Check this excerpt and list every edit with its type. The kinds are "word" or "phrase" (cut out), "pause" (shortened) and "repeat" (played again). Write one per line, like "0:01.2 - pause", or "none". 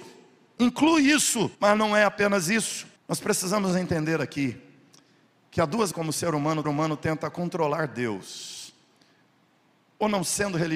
0:01.5 - pause
0:03.0 - pause
0:05.9 - word
0:06.6 - repeat